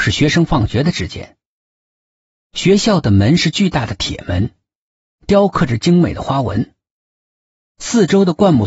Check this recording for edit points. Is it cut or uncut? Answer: uncut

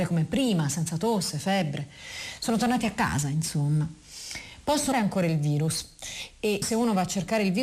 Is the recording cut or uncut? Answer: cut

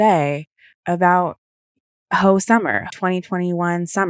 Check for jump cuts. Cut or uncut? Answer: cut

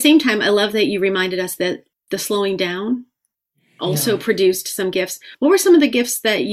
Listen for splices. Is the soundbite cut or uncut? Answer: cut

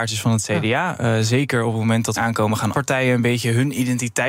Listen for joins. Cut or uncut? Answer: cut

